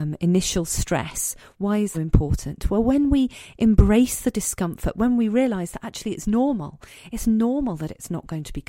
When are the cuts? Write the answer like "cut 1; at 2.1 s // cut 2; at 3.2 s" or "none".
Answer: cut 1; at 1.9 s